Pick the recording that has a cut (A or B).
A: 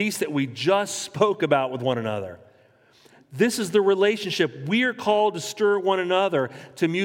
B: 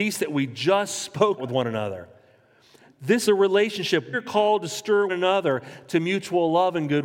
B